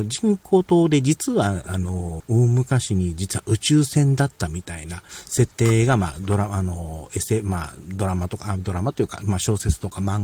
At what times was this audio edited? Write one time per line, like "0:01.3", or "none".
0:02.2